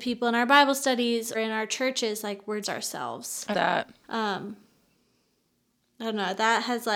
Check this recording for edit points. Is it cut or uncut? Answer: cut